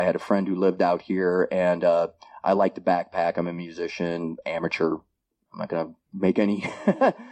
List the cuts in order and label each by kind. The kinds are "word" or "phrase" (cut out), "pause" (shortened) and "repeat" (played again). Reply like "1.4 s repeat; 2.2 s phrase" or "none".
none